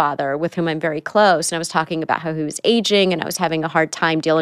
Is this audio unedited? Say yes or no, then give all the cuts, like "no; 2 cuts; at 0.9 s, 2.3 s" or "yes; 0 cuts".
yes; 0 cuts